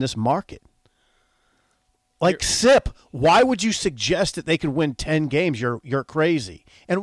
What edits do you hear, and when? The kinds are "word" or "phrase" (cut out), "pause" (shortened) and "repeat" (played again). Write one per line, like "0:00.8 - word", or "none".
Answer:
none